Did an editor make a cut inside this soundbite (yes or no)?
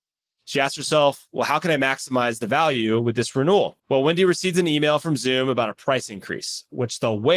yes